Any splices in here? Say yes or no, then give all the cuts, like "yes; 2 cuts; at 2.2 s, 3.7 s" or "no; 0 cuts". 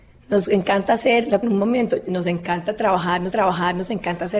yes; 2 cuts; at 1.4 s, 3.3 s